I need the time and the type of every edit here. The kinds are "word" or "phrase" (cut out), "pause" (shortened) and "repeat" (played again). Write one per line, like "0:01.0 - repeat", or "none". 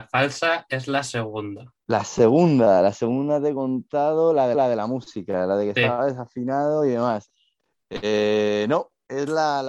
0:01.8 - pause
0:04.5 - repeat